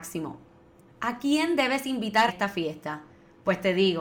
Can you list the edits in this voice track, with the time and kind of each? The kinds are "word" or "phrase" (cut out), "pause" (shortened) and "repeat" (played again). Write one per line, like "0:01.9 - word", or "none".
0:02.3 - word